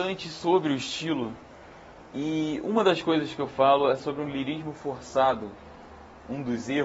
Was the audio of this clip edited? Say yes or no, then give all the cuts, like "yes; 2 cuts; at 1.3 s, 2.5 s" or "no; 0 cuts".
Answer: no; 0 cuts